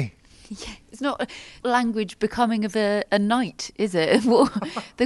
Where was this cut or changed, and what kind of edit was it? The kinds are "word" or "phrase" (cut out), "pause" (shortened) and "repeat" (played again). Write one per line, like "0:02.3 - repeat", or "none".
0:01.6 - word